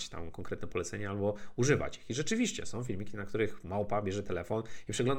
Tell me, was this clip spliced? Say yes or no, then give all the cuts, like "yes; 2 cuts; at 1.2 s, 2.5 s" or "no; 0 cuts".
no; 0 cuts